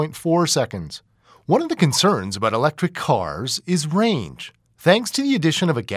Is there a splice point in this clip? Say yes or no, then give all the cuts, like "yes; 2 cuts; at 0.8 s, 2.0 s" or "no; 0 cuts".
no; 0 cuts